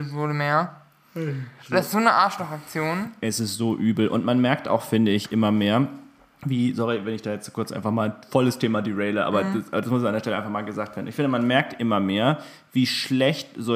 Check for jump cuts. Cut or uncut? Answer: uncut